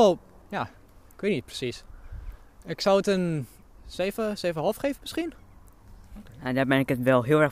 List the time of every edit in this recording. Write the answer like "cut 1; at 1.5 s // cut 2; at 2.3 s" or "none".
none